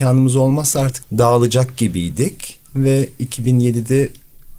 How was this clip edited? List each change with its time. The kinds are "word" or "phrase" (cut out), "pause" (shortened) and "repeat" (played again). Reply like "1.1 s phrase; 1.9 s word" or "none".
1.0 s word; 2.6 s pause